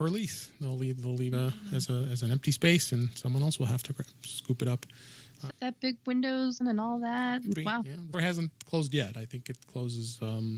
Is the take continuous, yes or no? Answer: no